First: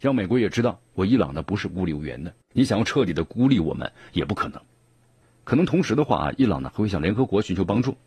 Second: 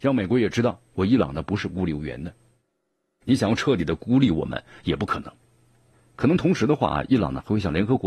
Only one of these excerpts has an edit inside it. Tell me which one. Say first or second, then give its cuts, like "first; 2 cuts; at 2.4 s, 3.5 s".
first; 1 cut; at 2.4 s